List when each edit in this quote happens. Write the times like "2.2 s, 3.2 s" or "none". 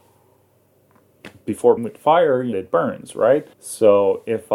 1.8 s, 2.5 s, 3.5 s